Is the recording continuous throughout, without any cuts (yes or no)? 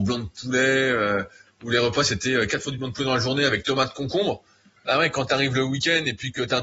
yes